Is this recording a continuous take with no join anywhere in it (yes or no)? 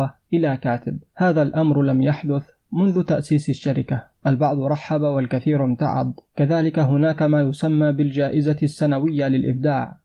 no